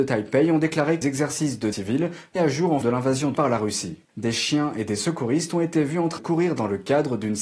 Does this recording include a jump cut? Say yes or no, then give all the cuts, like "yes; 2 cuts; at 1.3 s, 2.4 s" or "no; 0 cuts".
yes; 7 cuts; at 1.0 s, 1.7 s, 2.4 s, 2.8 s, 3.3 s, 4.0 s, 6.2 s